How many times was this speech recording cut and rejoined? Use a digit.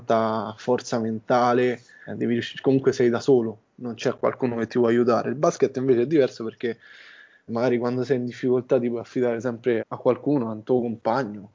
3